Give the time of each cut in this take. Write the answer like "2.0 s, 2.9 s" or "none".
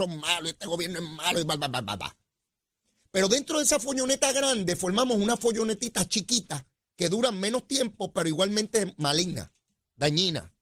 none